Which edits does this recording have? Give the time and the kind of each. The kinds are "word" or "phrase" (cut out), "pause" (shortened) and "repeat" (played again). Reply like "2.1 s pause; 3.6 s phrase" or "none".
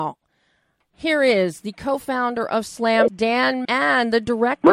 3.1 s word; 3.6 s word